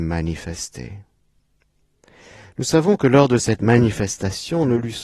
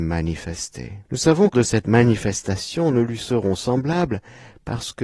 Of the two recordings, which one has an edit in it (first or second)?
second